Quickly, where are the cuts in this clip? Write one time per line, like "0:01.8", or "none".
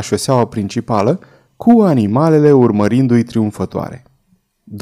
none